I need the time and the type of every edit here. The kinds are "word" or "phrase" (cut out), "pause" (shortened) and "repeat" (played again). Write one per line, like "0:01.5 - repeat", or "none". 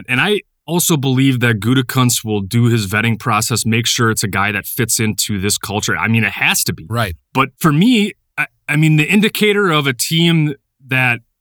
0:07.5 - pause